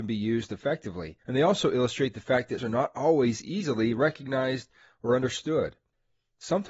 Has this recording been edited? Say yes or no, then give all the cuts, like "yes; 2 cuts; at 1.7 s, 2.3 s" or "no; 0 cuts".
yes; 2 cuts; at 1.2 s, 2.6 s